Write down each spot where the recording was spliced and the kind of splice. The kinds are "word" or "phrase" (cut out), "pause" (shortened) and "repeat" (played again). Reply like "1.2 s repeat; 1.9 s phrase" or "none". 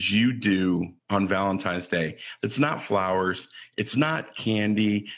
1.0 s pause